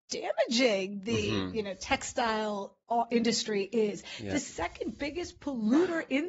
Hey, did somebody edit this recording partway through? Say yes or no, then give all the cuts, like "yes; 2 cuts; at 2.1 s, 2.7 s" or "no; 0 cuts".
no; 0 cuts